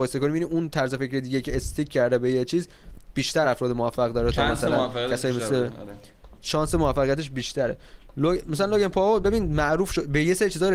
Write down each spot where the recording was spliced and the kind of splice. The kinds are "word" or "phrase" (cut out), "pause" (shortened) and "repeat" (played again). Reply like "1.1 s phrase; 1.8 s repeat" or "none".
none